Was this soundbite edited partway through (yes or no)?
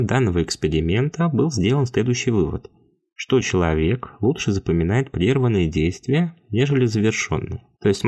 no